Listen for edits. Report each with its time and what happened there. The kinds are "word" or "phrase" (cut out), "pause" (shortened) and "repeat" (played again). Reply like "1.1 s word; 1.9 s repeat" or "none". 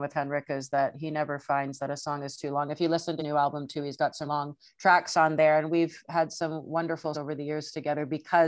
3.2 s word; 4.3 s word; 4.6 s pause; 7.1 s word